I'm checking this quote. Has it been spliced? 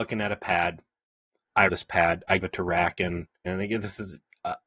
yes; 3 cuts; at 1.7 s, 2.4 s, 3.5 s

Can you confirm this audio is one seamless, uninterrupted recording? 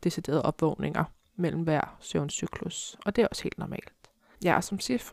yes; 0 cuts

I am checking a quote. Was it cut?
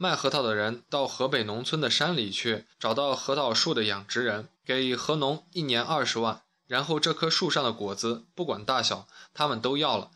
yes; 2 cuts; at 2.7 s, 4.5 s

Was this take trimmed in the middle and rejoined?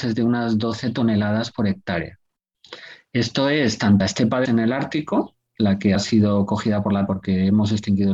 yes; 4 cuts; at 4.0 s, 4.5 s, 6.0 s, 7.1 s

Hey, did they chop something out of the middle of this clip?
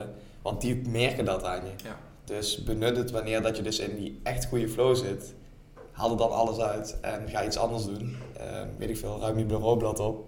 no; 0 cuts

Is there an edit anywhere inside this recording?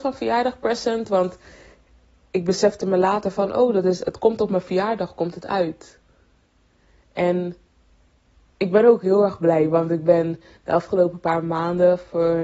no; 0 cuts

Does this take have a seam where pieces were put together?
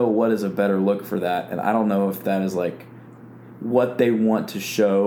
no; 0 cuts

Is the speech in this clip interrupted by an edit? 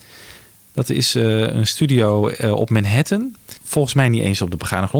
yes; 1 cut; at 3.6 s

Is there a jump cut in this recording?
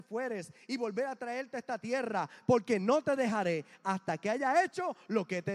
no; 0 cuts

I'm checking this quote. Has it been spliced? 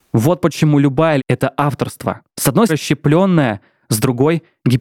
yes; 3 cuts; at 1.2 s, 2.3 s, 2.7 s

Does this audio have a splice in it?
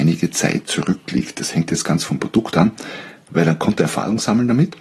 no; 0 cuts

